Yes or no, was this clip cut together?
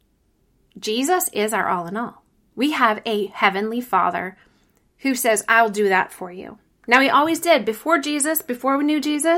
no